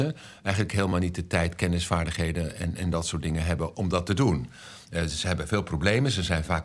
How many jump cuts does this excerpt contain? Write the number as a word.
zero